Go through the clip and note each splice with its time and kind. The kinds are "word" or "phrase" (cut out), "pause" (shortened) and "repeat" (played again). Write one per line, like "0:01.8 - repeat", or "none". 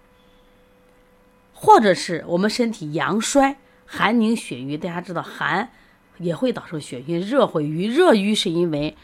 none